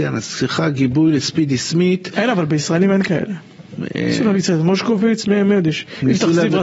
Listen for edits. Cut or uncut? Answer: uncut